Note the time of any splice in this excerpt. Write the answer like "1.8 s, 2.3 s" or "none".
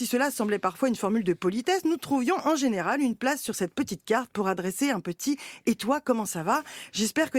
none

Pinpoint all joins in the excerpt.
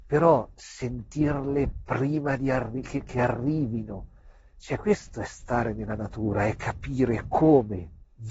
none

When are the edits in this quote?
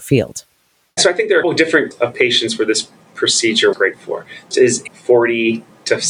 1.4 s, 1.9 s, 3.7 s, 4.5 s, 4.9 s

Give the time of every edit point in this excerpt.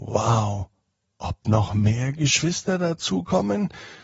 1.4 s

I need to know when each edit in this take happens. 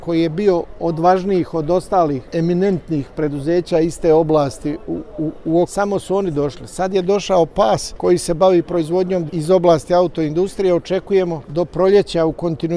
5.6 s, 9.3 s

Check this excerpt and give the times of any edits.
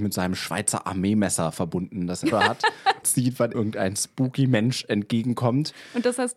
2.3 s, 3.0 s, 3.5 s

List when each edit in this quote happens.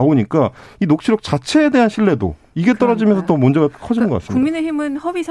none

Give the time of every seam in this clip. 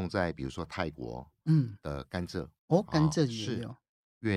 2.6 s

